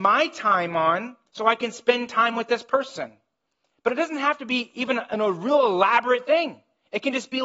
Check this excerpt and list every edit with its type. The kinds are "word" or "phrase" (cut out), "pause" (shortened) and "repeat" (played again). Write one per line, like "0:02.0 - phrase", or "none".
0:01.3 - pause